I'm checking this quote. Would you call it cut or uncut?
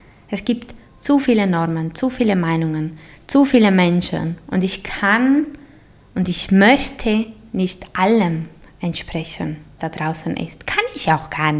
cut